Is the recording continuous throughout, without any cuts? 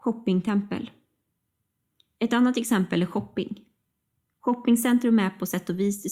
yes; 0 cuts

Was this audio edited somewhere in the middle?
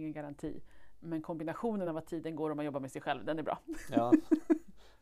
no; 0 cuts

